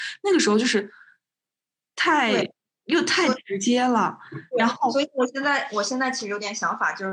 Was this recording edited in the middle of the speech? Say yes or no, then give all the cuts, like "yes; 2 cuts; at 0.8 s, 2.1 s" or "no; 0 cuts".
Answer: yes; 1 cut; at 2.6 s